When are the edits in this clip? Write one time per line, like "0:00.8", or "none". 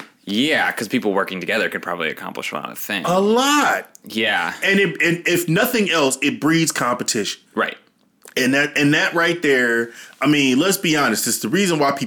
0:07.5